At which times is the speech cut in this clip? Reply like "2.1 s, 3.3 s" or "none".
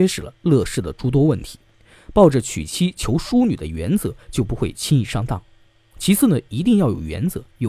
none